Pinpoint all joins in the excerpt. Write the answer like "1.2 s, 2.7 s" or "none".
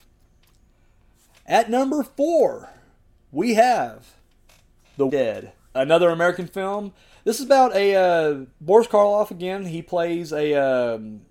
5.1 s, 5.7 s